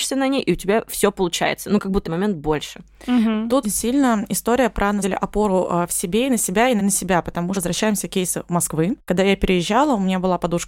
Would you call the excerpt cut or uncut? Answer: cut